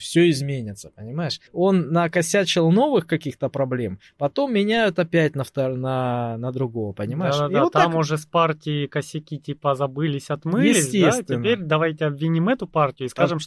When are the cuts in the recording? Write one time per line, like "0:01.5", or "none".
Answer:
0:01.5